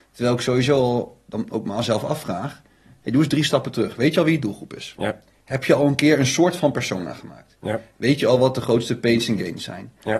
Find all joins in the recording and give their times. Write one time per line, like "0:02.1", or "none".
none